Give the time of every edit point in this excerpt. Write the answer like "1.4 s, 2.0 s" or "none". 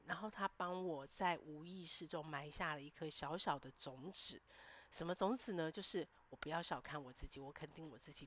none